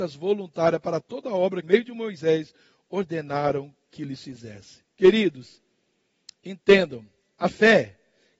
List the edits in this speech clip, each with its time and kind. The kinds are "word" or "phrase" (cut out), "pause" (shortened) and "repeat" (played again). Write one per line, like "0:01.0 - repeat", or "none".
0:01.6 - phrase